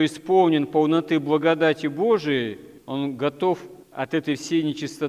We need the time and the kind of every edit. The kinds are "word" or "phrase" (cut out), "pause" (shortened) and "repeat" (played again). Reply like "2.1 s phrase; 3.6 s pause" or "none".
none